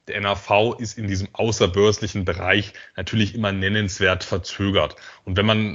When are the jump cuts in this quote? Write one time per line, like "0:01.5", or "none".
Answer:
none